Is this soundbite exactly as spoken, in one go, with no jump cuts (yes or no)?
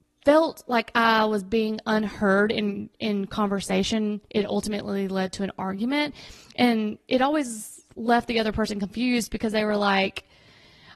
yes